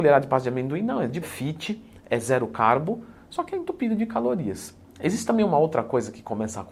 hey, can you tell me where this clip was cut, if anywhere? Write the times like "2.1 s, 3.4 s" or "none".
1.2 s